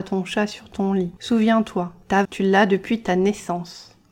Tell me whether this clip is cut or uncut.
cut